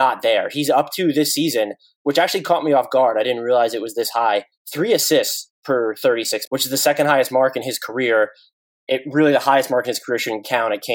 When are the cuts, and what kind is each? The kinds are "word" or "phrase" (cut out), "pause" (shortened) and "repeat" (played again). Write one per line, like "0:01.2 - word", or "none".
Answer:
0:06.5 - word